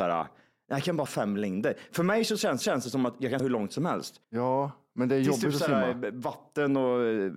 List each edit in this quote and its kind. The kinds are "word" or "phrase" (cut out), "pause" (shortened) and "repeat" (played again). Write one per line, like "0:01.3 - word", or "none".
0:01.1 - word
0:02.6 - repeat
0:03.4 - word
0:04.2 - pause